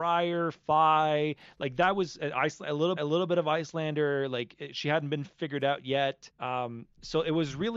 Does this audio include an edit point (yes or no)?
yes